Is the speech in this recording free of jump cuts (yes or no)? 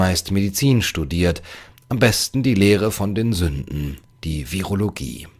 yes